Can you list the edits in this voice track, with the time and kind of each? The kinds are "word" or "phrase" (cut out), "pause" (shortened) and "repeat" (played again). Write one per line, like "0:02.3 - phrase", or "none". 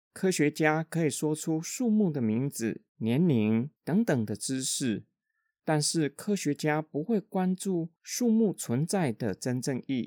0:02.9 - pause
0:03.8 - pause
0:08.0 - pause